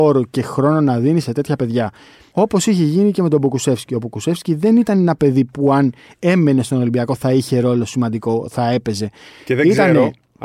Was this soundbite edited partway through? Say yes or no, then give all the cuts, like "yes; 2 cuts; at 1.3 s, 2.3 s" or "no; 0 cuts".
no; 0 cuts